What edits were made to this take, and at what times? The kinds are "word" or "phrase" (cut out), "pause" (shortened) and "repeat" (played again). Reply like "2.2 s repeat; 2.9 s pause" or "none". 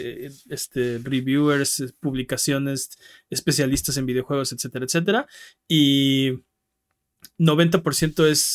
none